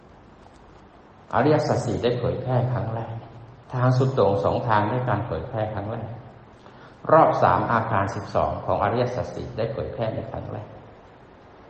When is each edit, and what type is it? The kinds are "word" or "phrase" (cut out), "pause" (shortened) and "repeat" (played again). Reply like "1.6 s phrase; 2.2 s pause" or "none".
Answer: 3.6 s pause